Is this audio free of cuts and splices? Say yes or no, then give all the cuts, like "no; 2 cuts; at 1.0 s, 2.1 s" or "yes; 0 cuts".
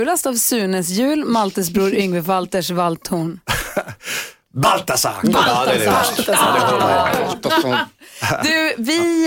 yes; 0 cuts